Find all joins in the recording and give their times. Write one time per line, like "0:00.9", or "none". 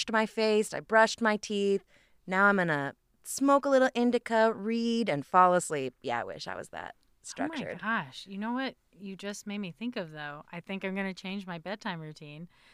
none